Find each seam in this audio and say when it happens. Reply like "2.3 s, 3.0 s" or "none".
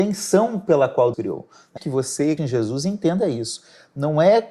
1.1 s, 1.8 s, 2.4 s

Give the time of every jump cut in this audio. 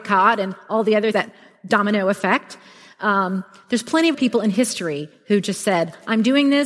1.1 s, 4.1 s

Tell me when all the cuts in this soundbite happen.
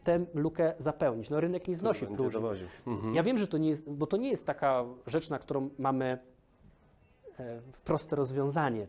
none

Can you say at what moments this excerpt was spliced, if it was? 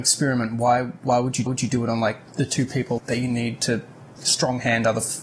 1.5 s, 2.3 s, 3.0 s

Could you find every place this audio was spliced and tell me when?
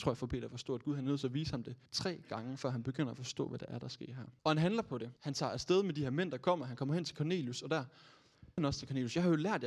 1.9 s, 4.4 s, 5.2 s, 8.6 s

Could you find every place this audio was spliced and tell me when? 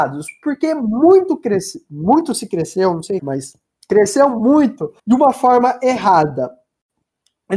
3.2 s, 5.0 s

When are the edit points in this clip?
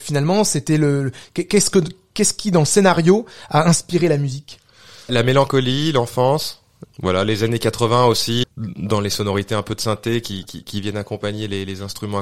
5.1 s, 6.8 s, 8.4 s

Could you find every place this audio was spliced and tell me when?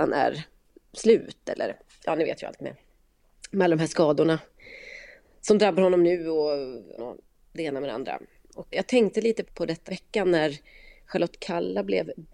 7.0 s, 8.7 s, 9.4 s, 9.9 s

